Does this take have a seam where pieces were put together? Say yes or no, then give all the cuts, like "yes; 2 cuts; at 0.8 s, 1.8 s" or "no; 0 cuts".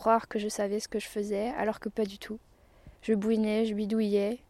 yes; 1 cut; at 3.0 s